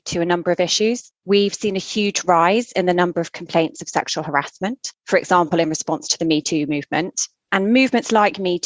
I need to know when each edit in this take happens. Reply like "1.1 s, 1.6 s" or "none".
1.2 s, 5.0 s

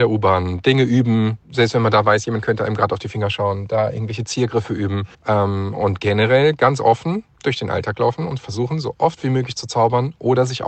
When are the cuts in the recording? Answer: 1.4 s, 5.1 s, 7.3 s

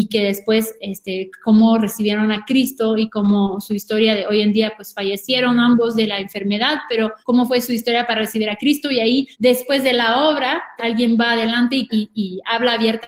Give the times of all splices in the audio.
7.2 s, 9.3 s, 10.8 s, 11.9 s

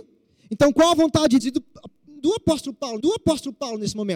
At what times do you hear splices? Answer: 1.4 s, 3.0 s

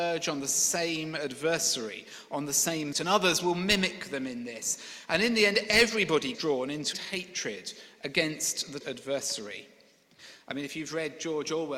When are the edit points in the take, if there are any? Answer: 2.9 s, 6.3 s, 6.9 s, 8.8 s

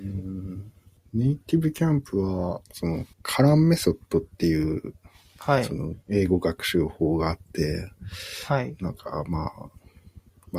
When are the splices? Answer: 2.6 s, 3.1 s

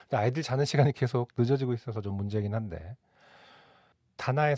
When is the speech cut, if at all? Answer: none

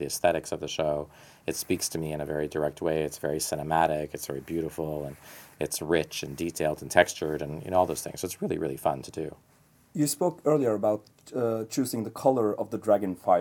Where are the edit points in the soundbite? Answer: none

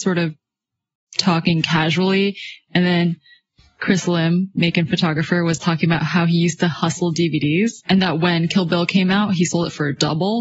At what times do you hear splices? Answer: none

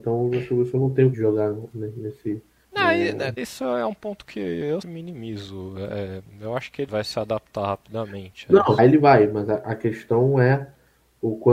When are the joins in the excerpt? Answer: 1.1 s, 2.6 s, 3.4 s, 4.8 s, 6.9 s, 8.8 s

